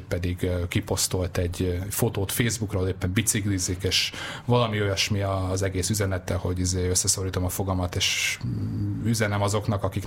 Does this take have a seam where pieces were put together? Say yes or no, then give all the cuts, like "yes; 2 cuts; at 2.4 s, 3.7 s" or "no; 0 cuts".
no; 0 cuts